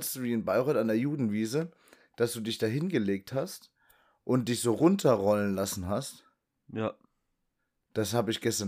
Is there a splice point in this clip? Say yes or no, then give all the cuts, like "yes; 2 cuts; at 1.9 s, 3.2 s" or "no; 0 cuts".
no; 0 cuts